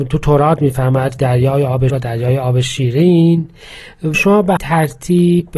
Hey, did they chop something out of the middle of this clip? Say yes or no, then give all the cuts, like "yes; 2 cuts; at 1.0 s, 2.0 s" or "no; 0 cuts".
yes; 4 cuts; at 1.2 s, 1.9 s, 4.1 s, 4.6 s